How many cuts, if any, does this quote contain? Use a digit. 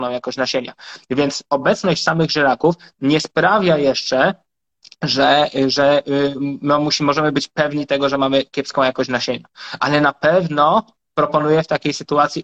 0